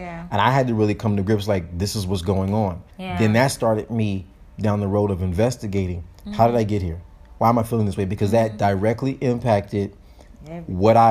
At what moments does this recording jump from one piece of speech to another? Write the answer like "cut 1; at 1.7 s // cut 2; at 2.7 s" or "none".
cut 1; at 2.9 s